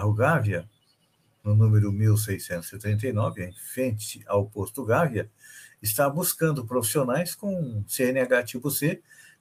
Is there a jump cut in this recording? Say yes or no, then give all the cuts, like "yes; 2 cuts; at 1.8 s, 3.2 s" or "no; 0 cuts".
no; 0 cuts